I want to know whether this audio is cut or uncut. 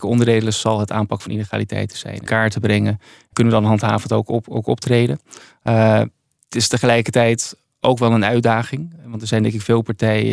cut